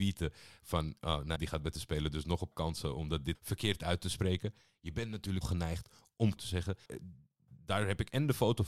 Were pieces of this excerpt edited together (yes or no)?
yes